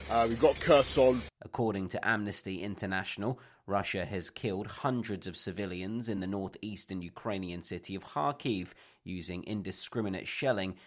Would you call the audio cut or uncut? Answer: uncut